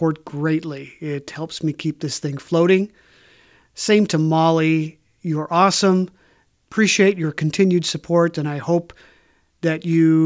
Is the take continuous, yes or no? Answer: yes